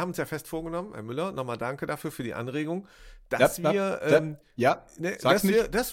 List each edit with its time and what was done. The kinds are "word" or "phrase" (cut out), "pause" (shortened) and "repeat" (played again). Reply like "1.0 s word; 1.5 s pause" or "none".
none

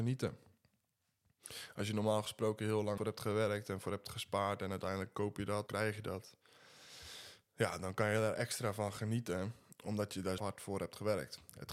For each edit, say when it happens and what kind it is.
3.0 s word; 5.7 s word; 10.4 s word

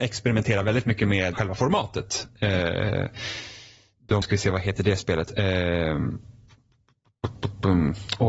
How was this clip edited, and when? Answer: 1.3 s word; 4.2 s word

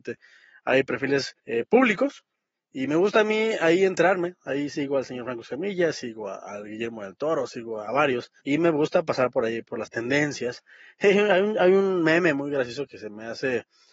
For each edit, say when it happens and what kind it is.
1.4 s pause; 2.5 s pause; 8.4 s pause

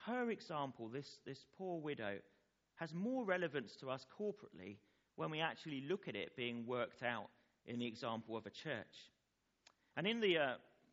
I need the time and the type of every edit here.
none

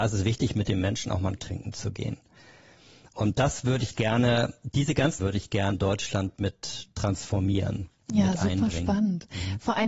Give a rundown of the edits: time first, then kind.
1.4 s word; 5.2 s word; 5.7 s word

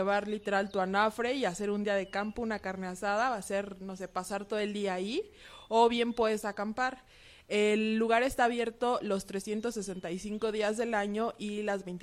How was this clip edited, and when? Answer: none

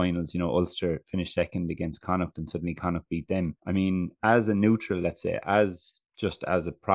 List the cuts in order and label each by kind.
3.6 s pause

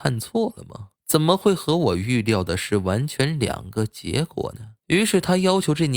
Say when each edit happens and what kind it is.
0.9 s pause; 4.8 s pause

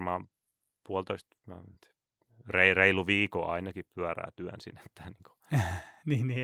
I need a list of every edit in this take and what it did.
none

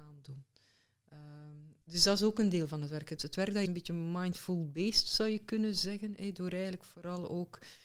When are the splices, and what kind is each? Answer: 1.8 s pause; 3.2 s word; 3.7 s phrase

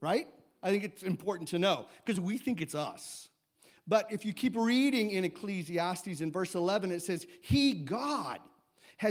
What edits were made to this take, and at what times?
2.1 s word

